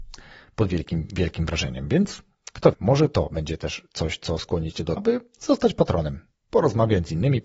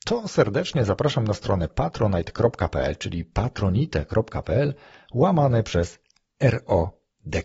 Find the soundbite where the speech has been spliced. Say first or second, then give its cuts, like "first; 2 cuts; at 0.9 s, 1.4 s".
first; 2 cuts; at 2.7 s, 5.0 s